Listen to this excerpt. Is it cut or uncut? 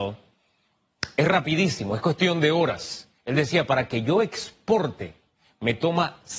cut